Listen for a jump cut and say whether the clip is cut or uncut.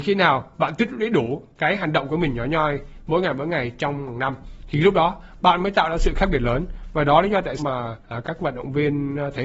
cut